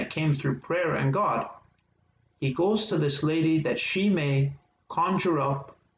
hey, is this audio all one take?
yes; 0 cuts

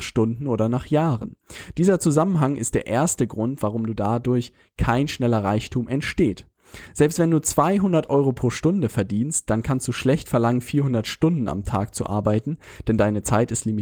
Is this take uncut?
yes; 0 cuts

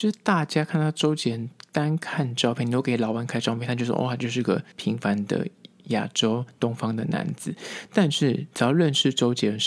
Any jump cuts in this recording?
yes; 1 cut; at 4.7 s

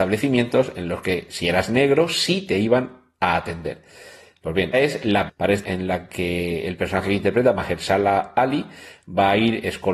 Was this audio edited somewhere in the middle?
yes; 3 cuts; at 4.7 s, 5.3 s, 5.6 s

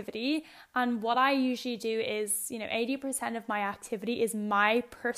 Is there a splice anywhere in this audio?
no; 0 cuts

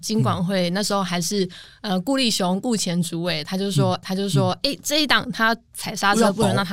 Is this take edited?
yes; 1 cut; at 4.0 s

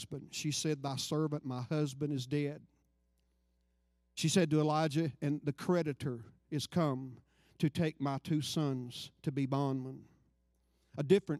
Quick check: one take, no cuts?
yes; 0 cuts

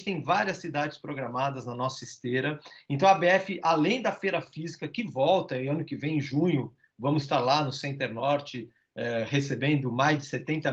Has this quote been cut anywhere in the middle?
no; 0 cuts

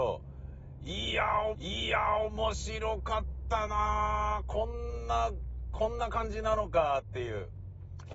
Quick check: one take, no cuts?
no; 1 cut; at 1.5 s

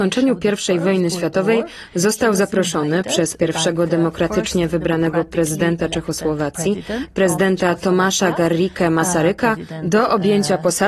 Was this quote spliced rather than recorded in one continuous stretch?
no; 0 cuts

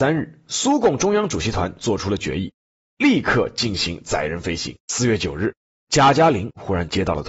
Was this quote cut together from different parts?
yes; 1 cut; at 4.8 s

